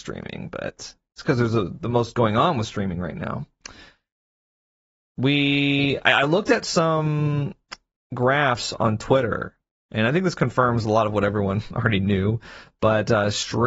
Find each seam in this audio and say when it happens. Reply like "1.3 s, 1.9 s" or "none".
none

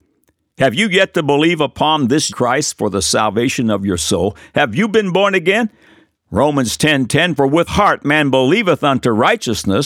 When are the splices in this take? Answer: 2.3 s, 7.7 s

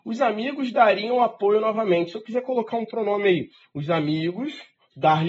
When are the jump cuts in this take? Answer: none

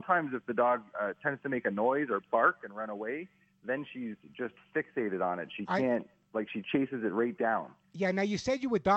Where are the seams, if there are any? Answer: none

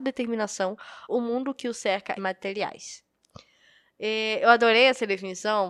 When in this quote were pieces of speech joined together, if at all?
1.1 s, 2.2 s

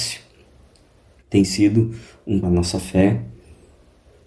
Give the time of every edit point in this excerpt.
2.4 s

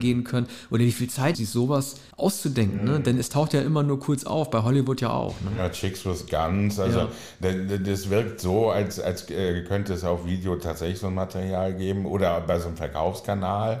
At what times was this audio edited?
1.3 s, 2.1 s

